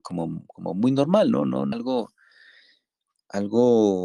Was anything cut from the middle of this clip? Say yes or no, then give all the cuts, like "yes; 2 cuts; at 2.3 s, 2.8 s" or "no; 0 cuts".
yes; 1 cut; at 1.7 s